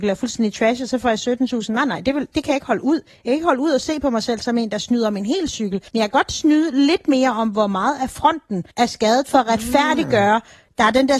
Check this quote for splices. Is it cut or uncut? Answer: cut